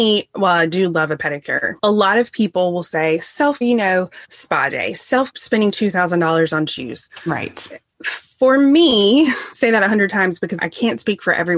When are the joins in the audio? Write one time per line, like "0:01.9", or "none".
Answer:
0:01.8
0:03.6
0:04.2
0:05.3
0:09.5
0:10.6